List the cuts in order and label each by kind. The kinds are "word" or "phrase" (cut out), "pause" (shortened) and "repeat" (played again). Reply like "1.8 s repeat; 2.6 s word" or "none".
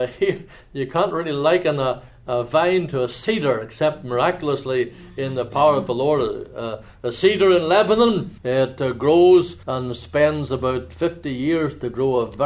8.4 s pause; 9.6 s pause